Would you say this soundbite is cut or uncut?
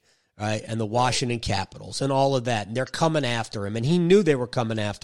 uncut